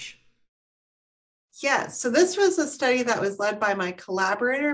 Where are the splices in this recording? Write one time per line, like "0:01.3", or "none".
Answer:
none